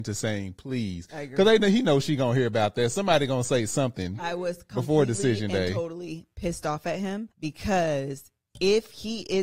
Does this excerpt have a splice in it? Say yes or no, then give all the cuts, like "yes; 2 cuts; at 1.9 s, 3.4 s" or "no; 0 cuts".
yes; 1 cut; at 7.3 s